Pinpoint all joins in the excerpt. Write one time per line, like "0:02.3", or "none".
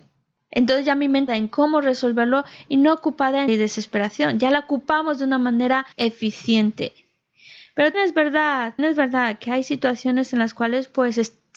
0:01.3
0:03.5
0:05.9
0:07.9
0:08.8